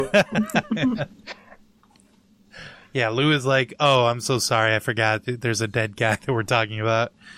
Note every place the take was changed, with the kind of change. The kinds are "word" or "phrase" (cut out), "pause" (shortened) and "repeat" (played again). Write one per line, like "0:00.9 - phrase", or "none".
none